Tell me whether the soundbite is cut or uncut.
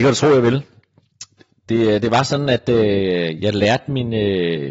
uncut